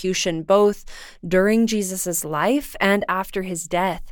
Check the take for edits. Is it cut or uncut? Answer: uncut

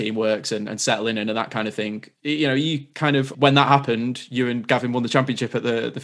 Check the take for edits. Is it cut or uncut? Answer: cut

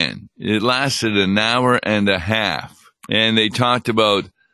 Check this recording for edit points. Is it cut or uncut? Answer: cut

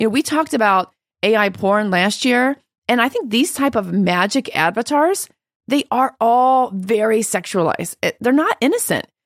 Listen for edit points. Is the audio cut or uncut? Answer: uncut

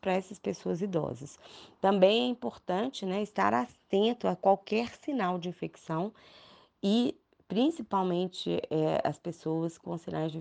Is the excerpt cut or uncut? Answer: uncut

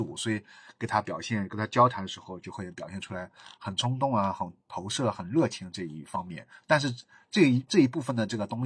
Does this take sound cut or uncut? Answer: uncut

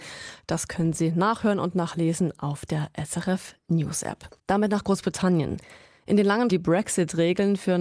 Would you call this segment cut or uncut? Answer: cut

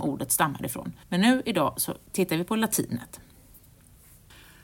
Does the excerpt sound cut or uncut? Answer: cut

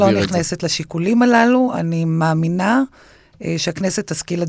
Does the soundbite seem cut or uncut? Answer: uncut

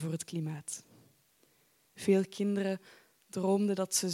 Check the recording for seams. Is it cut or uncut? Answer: uncut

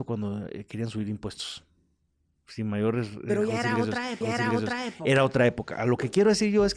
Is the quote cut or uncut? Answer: cut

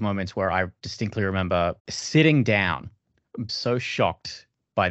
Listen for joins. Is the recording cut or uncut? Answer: cut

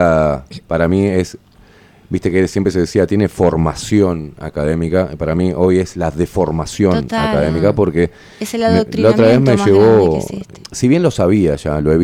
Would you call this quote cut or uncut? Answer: uncut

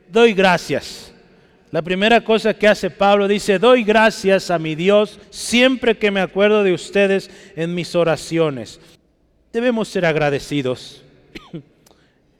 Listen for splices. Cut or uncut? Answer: cut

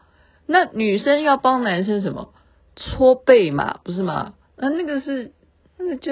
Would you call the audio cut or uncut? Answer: uncut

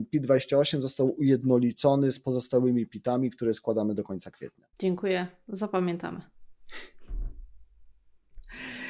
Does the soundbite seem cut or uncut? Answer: cut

